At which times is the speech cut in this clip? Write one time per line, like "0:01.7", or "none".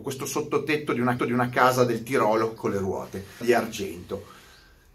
0:01.2
0:02.6
0:03.4